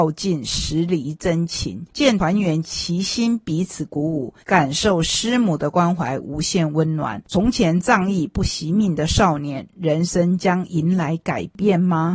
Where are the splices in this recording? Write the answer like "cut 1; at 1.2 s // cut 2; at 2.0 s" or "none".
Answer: cut 1; at 4.4 s